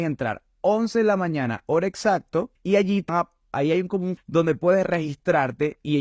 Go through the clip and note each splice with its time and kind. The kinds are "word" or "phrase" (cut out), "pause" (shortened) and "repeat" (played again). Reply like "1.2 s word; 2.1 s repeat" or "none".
2.6 s pause; 3.1 s word; 4.2 s word